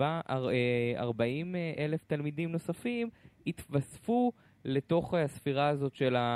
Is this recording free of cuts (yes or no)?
yes